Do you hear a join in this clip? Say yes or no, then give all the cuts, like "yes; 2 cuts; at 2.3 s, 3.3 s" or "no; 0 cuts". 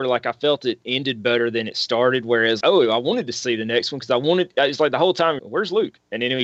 yes; 2 cuts; at 2.6 s, 5.4 s